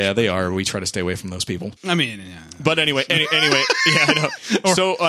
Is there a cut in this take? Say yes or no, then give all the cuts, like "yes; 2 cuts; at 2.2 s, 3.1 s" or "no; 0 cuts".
yes; 1 cut; at 1.8 s